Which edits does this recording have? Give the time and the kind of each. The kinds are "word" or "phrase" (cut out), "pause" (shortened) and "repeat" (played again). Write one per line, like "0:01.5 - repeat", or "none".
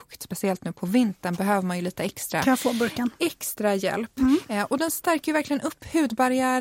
none